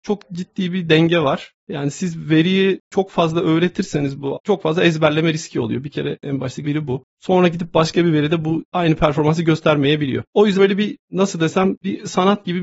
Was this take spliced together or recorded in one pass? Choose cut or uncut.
cut